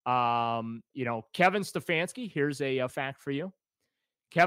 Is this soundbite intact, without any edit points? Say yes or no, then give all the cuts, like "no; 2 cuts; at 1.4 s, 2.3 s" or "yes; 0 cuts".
no; 2 cuts; at 0.9 s, 2.9 s